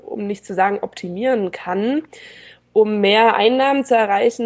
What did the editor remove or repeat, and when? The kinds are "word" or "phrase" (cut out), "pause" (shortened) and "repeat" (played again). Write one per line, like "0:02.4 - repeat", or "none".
none